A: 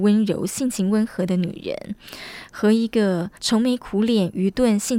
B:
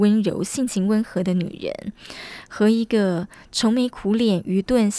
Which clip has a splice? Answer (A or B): A